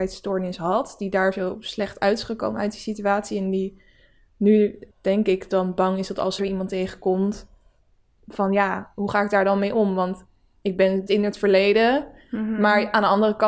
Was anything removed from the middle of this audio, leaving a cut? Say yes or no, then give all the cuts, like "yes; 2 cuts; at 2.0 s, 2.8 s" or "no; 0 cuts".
yes; 3 cuts; at 4.9 s, 6.4 s, 11.1 s